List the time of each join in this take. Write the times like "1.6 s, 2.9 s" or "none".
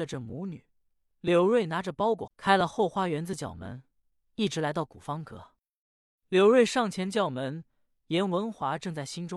2.3 s

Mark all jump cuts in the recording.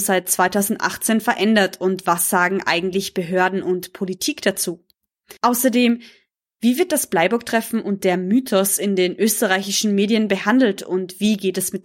5.4 s

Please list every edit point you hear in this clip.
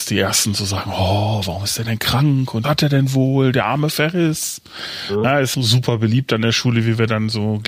2.6 s, 5.5 s

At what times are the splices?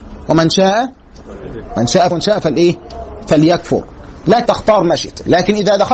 1.7 s, 2.1 s, 4.5 s

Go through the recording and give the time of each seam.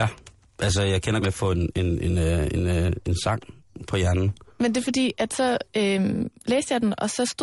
1.2 s, 4.5 s

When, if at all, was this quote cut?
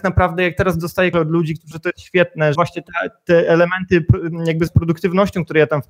1.1 s, 1.7 s, 2.6 s, 4.7 s

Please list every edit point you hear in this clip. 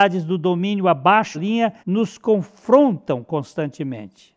1.3 s, 1.8 s

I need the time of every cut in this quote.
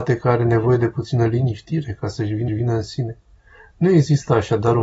2.5 s

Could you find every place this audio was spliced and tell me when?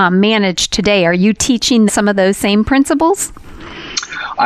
1.9 s

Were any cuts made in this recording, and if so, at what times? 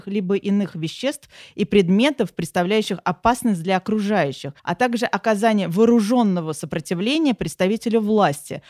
4.6 s

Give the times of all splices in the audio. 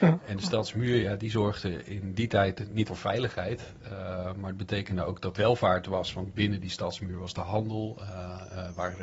2.9 s, 5.3 s

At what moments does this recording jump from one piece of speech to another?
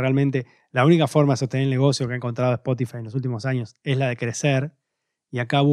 none

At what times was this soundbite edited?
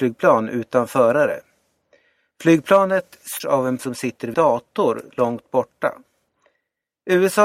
3.4 s, 3.8 s, 4.3 s

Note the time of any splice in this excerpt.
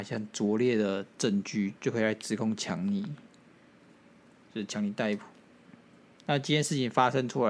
1.8 s

